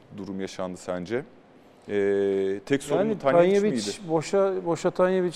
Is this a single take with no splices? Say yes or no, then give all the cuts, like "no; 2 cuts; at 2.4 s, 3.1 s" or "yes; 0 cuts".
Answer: yes; 0 cuts